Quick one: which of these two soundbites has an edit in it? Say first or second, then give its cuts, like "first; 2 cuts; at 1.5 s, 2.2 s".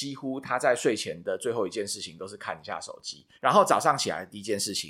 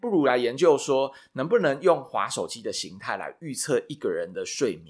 first; 1 cut; at 3.3 s